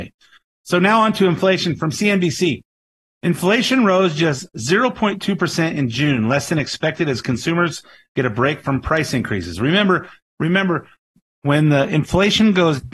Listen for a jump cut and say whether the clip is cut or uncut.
uncut